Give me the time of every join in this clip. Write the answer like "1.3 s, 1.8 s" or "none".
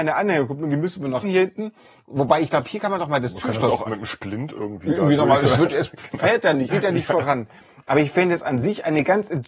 1.2 s, 3.9 s, 5.7 s, 6.7 s